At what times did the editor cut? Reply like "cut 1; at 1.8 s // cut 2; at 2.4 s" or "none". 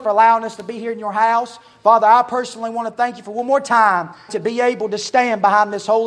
cut 1; at 4.3 s